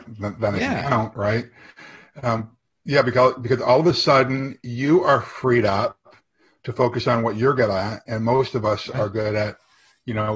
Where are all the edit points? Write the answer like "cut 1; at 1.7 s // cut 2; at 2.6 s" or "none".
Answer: none